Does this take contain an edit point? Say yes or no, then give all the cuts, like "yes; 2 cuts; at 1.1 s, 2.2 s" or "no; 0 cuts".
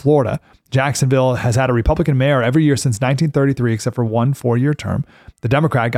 no; 0 cuts